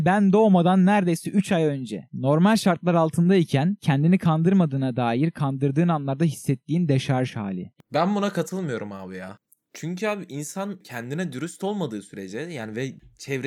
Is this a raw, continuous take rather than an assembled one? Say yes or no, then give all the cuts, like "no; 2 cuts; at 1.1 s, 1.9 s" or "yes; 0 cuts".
yes; 0 cuts